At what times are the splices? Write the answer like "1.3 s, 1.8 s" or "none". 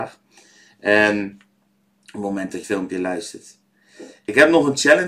2.6 s